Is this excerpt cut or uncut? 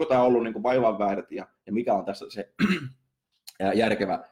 uncut